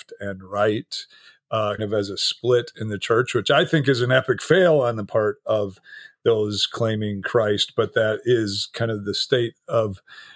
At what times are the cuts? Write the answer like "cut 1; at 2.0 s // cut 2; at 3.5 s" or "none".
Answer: cut 1; at 1.8 s